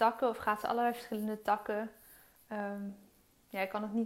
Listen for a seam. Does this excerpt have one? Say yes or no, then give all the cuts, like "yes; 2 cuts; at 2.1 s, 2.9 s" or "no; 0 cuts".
no; 0 cuts